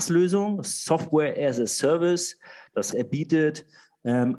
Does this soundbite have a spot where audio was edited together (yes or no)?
yes